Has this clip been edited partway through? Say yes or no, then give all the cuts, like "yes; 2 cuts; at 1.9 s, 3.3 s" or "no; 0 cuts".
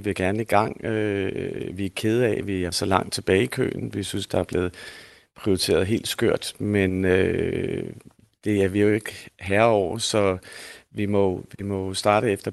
yes; 1 cut; at 2.7 s